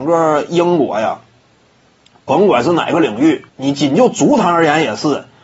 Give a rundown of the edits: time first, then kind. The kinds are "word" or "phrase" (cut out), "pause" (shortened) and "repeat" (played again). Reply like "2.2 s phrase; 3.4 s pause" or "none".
3.5 s pause